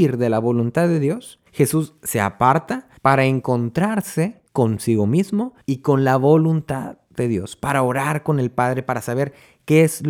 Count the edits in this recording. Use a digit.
4